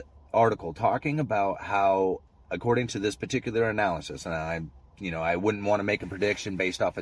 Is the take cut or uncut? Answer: uncut